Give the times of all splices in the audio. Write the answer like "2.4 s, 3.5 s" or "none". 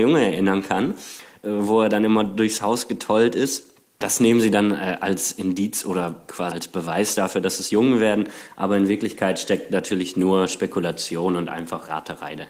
6.5 s